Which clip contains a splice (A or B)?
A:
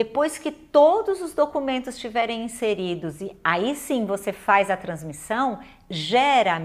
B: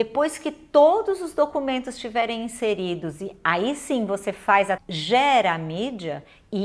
B